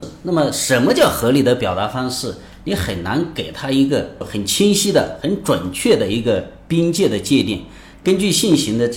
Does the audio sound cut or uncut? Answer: uncut